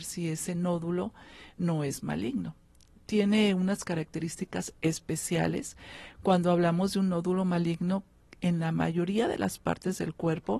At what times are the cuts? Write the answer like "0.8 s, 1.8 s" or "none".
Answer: none